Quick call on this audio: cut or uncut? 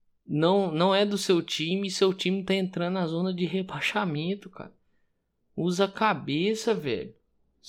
uncut